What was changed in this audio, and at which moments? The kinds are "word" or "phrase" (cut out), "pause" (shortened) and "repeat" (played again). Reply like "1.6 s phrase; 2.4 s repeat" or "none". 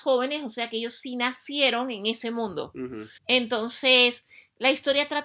3.2 s pause